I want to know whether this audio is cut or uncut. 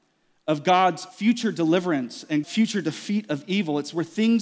cut